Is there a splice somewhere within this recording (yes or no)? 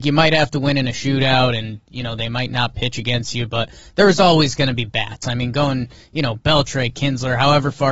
no